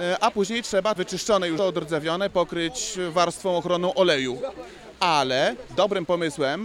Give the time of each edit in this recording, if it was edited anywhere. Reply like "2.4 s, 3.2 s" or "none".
1.0 s, 1.6 s